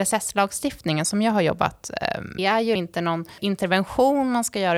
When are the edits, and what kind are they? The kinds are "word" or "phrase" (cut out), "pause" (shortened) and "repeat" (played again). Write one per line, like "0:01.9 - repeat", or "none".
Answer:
0:02.4 - phrase

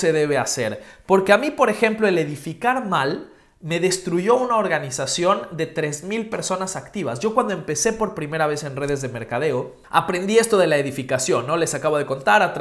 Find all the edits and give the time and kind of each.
0:09.8 - pause

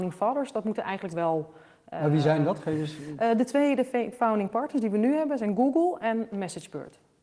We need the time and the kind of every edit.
0:04.1 - word

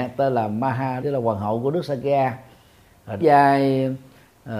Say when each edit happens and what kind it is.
0:01.0 - word
0:03.2 - word

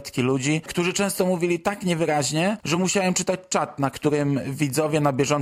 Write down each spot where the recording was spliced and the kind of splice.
none

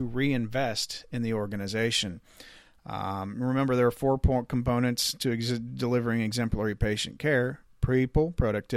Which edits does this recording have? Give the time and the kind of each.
none

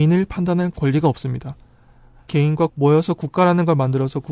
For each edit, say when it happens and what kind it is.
0:02.7 - word

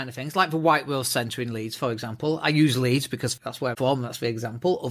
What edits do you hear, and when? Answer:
0:03.4 - word
0:03.7 - word

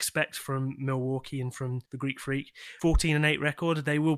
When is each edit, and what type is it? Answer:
0:01.9 - pause

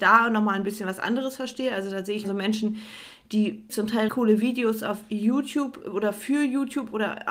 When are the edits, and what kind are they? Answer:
0:02.2 - word
0:03.7 - word
0:04.1 - word

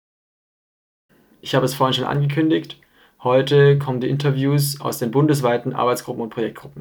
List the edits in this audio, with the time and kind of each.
none

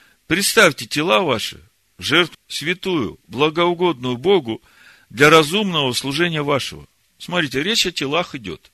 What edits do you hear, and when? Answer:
0:02.3 - word

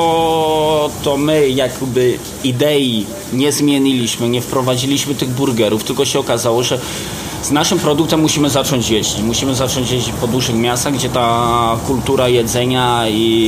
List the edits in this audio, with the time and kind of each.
none

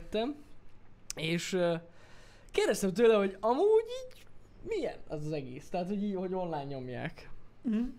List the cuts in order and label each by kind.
none

